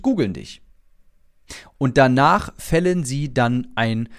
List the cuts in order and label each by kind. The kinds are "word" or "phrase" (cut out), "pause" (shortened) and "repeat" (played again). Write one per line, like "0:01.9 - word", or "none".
none